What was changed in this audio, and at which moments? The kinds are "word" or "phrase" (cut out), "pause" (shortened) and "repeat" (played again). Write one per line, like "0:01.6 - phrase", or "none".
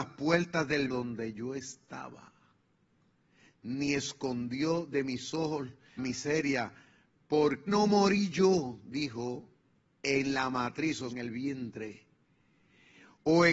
0:00.9 - word
0:06.0 - word
0:07.7 - word
0:09.7 - pause
0:11.1 - word